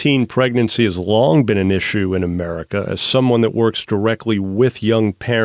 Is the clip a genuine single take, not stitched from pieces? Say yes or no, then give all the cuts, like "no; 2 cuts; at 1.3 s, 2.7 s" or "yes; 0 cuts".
yes; 0 cuts